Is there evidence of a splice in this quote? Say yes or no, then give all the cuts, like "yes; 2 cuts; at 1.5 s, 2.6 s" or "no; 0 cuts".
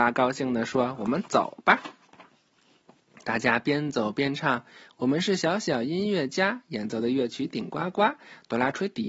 no; 0 cuts